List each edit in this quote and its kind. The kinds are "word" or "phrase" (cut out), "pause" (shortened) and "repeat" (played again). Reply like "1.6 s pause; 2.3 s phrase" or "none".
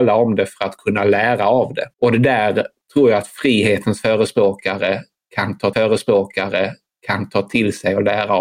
1.9 s pause; 5.7 s repeat